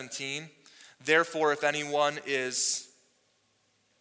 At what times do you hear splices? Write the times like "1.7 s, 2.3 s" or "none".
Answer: none